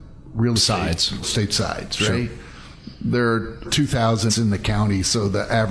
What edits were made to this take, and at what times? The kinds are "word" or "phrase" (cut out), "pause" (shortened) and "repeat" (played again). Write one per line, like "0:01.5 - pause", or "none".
0:01.2 - word
0:03.6 - word
0:04.3 - word